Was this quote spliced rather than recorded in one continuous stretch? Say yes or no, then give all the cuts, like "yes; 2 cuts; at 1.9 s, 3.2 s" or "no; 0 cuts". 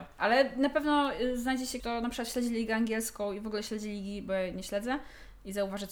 yes; 1 cut; at 1.8 s